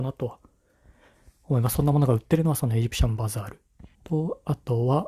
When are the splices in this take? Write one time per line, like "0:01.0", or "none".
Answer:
0:03.9

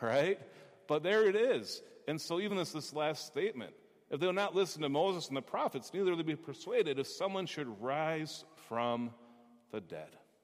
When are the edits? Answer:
none

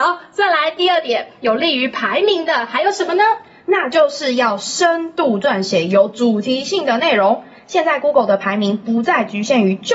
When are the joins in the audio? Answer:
none

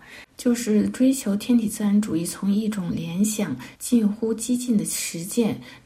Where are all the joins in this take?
0:03.8

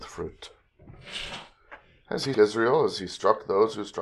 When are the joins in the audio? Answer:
0:02.3

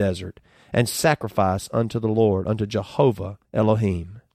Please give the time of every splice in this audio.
none

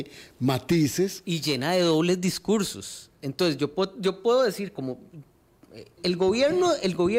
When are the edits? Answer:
0:06.0

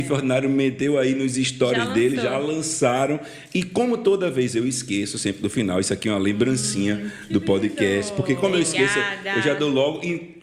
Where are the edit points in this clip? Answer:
none

